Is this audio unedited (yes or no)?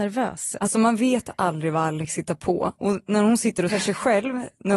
no